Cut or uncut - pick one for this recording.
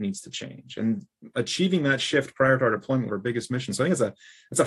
cut